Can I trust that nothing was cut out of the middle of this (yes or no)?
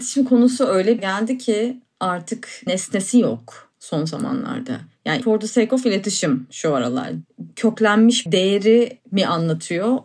no